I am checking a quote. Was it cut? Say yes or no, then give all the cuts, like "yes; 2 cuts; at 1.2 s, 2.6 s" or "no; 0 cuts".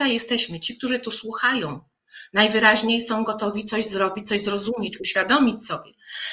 no; 0 cuts